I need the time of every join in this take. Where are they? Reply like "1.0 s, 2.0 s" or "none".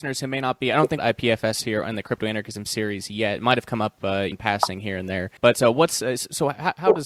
1.0 s, 4.3 s, 5.4 s